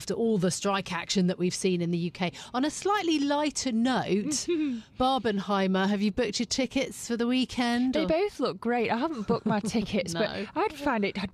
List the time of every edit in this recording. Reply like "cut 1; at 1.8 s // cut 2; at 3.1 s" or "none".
none